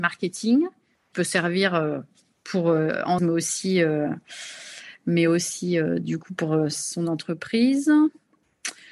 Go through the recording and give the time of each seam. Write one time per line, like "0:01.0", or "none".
0:01.1
0:03.2